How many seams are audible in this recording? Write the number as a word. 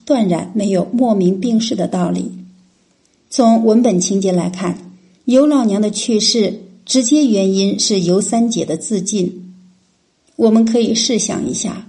zero